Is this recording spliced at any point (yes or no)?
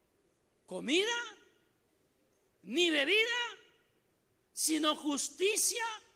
no